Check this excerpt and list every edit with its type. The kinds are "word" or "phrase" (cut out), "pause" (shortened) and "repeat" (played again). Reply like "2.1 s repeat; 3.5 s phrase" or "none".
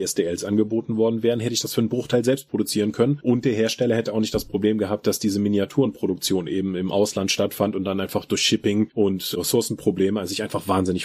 none